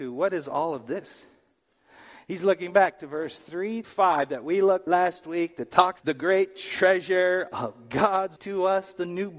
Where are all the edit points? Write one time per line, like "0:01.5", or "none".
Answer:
0:03.8
0:04.9
0:06.0
0:08.4